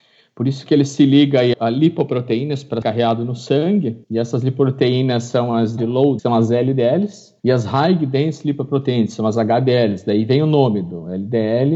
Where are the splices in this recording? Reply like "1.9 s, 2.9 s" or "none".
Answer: 1.5 s, 2.8 s, 4.0 s, 5.8 s, 6.2 s, 7.4 s